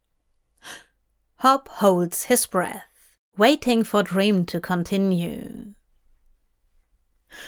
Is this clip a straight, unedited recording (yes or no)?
yes